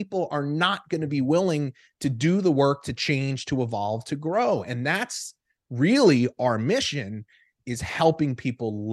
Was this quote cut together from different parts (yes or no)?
no